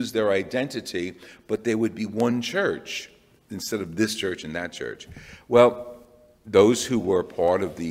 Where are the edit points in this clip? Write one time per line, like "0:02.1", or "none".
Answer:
none